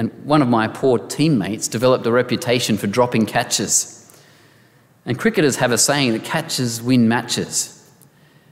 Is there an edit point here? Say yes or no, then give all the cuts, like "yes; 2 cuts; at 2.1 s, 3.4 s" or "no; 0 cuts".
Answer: no; 0 cuts